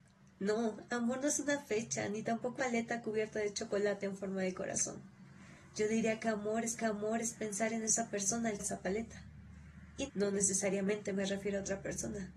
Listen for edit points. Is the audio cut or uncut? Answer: cut